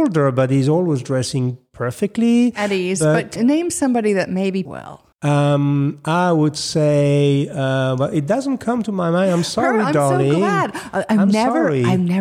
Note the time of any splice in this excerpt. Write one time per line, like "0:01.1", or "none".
0:03.4
0:04.7
0:05.1